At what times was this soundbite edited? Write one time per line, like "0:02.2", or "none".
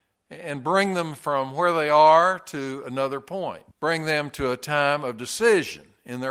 0:03.7